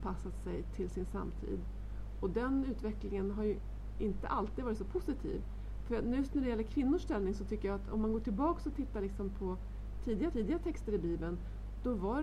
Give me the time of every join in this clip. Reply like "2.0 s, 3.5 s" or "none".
10.3 s